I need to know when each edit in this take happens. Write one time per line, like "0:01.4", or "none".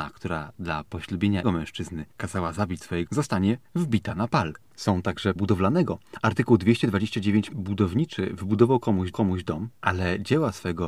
0:01.4
0:02.1
0:03.1
0:05.4
0:07.5
0:09.1